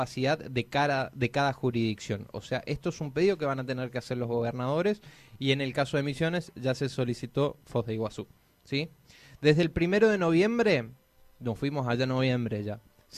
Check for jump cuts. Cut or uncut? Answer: uncut